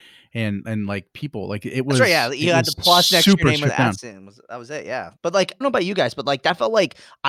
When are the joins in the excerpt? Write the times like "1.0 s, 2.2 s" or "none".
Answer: 5.2 s, 5.6 s